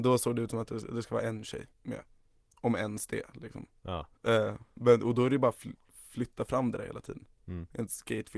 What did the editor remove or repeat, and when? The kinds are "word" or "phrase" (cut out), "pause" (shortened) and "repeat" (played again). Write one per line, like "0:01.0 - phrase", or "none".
0:01.7 - pause
0:04.2 - pause